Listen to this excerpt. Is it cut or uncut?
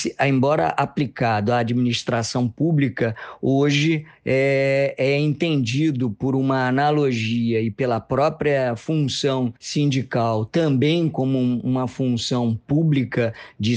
cut